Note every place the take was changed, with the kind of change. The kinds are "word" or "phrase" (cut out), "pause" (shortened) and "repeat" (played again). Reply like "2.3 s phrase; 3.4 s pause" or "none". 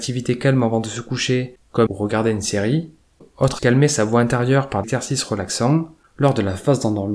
1.9 s word; 3.6 s word; 4.8 s word